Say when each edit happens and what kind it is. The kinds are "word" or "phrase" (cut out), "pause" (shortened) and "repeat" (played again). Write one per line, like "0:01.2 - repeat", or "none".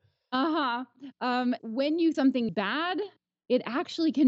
0:01.6 - word
0:02.1 - word
0:02.5 - word